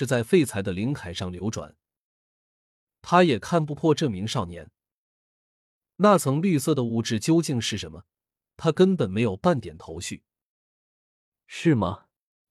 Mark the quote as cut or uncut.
uncut